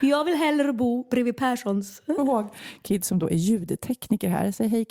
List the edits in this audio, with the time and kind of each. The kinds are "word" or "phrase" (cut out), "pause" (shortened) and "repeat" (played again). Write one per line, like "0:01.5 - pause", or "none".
0:02.2 - phrase